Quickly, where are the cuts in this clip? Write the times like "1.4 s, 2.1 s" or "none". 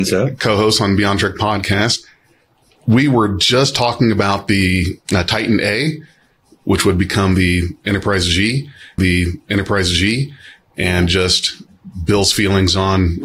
9.0 s